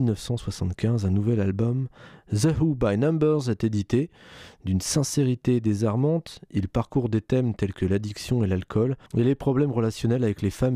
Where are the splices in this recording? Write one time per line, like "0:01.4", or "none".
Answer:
0:09.1

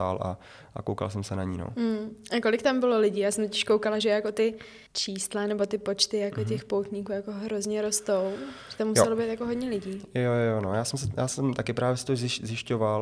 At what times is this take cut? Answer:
0:04.9

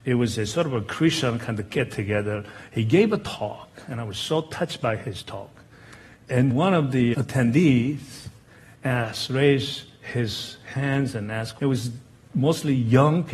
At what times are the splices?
0:06.5
0:07.1
0:11.6

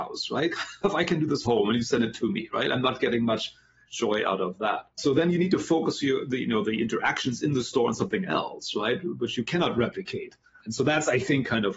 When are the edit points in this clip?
0:01.5
0:04.9
0:06.6

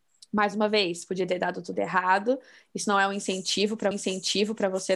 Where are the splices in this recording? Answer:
0:03.9

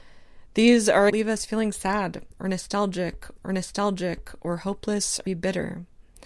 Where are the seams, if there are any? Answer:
0:01.1
0:03.4
0:05.3

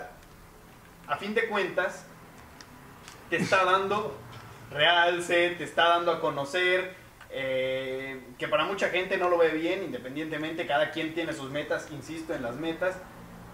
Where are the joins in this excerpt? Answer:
none

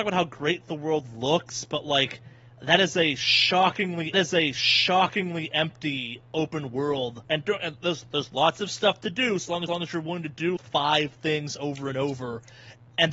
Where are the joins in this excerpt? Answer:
0:04.1
0:07.2
0:09.7
0:10.6

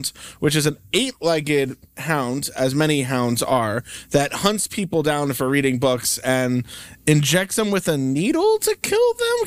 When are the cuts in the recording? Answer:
none

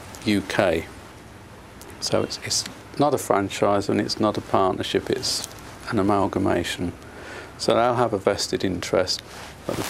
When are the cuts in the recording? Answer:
none

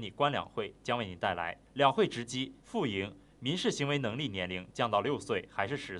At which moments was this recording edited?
0:01.6
0:02.6

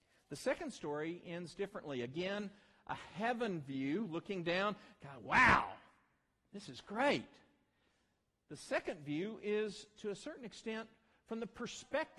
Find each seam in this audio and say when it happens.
none

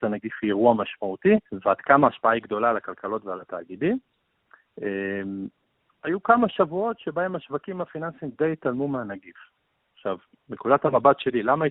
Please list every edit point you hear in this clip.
0:01.5
0:06.0

